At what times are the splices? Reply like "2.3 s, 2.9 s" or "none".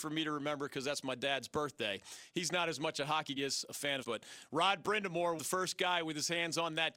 3.4 s, 4.0 s, 5.4 s

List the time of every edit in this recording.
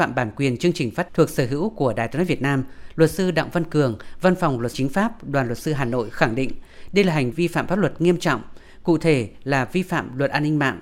1.1 s, 4.7 s, 7.3 s

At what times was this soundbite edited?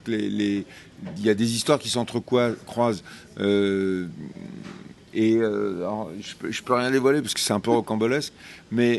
none

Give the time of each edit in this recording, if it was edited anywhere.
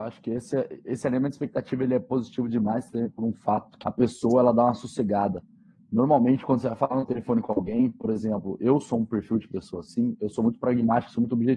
3.8 s

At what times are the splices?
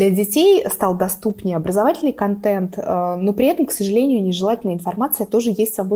none

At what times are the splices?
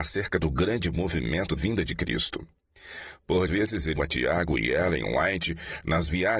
1.6 s, 3.5 s, 4.0 s

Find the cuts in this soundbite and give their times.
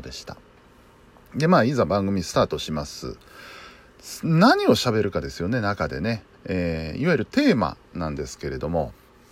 6.3 s

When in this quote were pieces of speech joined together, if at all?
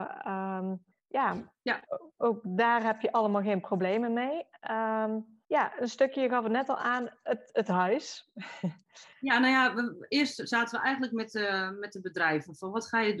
0.9 s, 5.4 s, 9.1 s

